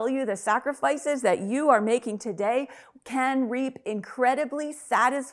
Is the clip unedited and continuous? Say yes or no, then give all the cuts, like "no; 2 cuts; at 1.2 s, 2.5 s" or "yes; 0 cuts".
yes; 0 cuts